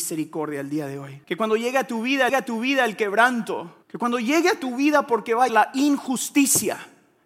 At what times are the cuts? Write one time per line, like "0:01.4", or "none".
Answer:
0:01.2
0:02.3
0:03.8
0:05.5